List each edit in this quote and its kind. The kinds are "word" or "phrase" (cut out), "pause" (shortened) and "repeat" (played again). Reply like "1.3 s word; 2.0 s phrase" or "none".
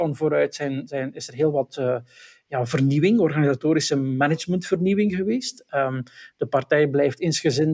none

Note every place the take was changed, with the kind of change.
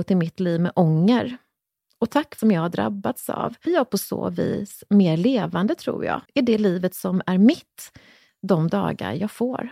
2.4 s phrase; 3.7 s word; 6.2 s pause

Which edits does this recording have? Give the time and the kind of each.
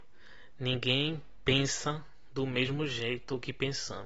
none

